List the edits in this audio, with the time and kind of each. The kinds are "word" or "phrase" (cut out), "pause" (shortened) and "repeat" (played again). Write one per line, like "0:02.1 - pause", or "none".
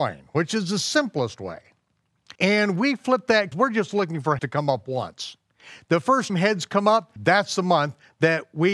0:02.4 - pause
0:03.5 - phrase
0:04.4 - word
0:06.3 - word
0:07.2 - word